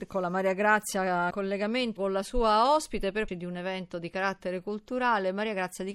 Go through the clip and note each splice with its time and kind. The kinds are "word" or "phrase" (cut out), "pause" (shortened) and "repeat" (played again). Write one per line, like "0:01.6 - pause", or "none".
0:01.3 - word
0:02.0 - word
0:03.3 - word